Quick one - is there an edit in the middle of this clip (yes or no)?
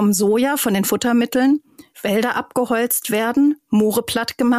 yes